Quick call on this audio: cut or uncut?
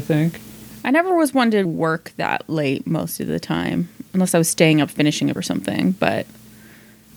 cut